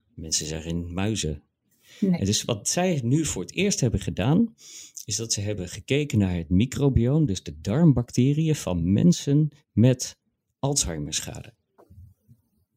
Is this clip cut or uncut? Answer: uncut